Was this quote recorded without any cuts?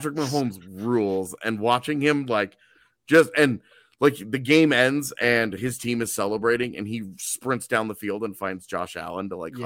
yes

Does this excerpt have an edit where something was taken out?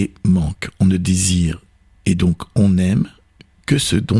no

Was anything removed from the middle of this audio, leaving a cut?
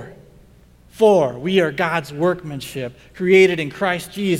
no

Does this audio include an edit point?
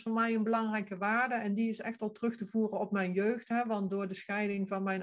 no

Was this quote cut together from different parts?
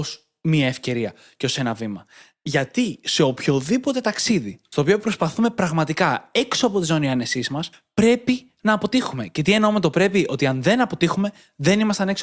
no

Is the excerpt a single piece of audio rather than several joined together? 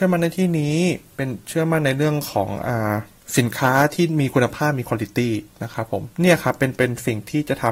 no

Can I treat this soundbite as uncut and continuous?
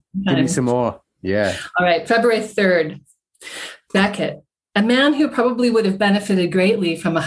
yes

